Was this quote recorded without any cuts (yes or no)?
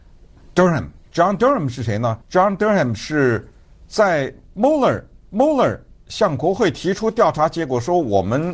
no